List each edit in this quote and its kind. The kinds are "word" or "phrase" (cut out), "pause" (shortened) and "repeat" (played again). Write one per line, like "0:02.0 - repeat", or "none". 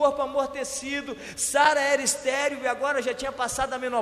none